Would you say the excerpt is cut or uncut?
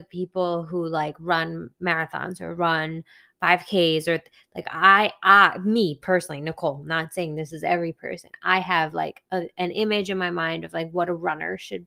uncut